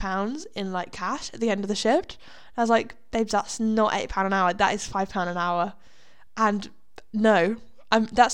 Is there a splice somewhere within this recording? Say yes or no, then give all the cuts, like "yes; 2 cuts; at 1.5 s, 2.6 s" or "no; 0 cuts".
no; 0 cuts